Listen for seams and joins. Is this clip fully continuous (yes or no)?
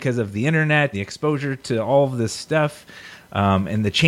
no